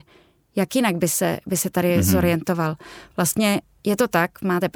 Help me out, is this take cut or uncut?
uncut